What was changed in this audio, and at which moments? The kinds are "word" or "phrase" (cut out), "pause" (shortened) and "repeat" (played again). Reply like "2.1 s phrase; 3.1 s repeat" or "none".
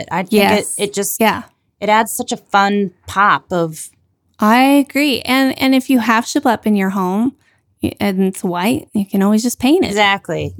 none